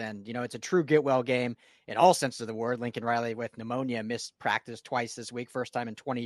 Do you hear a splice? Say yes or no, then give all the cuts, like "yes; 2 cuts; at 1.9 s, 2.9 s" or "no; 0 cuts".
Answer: no; 0 cuts